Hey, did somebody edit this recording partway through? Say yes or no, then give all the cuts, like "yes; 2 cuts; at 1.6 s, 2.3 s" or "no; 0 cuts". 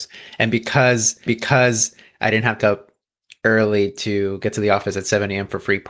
yes; 2 cuts; at 1.3 s, 2.6 s